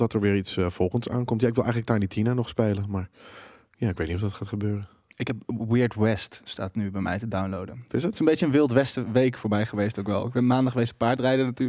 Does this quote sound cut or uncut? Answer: uncut